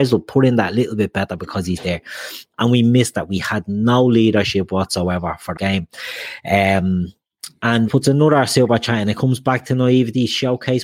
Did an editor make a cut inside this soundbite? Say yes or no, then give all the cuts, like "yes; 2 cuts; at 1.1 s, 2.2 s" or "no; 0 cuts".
yes; 2 cuts; at 5.6 s, 7.9 s